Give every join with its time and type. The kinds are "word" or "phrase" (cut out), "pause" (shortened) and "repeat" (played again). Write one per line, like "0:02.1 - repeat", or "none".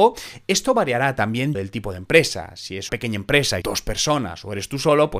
0:01.5 - word
0:02.9 - word
0:03.6 - word